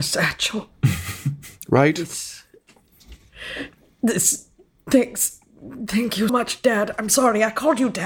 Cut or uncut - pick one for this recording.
cut